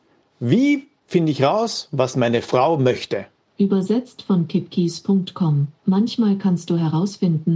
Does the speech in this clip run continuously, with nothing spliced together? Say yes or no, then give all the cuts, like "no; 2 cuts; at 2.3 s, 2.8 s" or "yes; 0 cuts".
no; 2 cuts; at 3.5 s, 5.8 s